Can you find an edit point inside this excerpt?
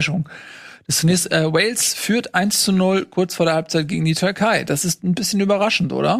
no; 0 cuts

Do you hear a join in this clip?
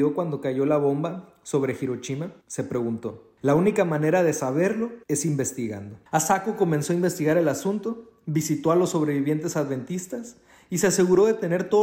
yes; 4 cuts; at 2.4 s, 3.4 s, 5.0 s, 6.1 s

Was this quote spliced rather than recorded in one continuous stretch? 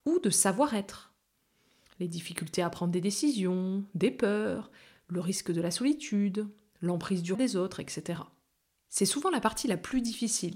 yes; 1 cut; at 7.3 s

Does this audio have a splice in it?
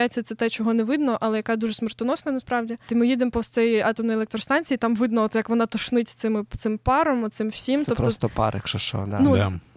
no; 0 cuts

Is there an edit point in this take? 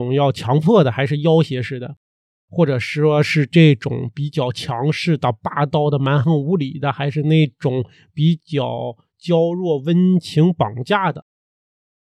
no; 0 cuts

